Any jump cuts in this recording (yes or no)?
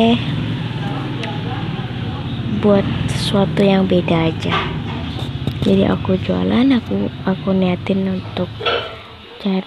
no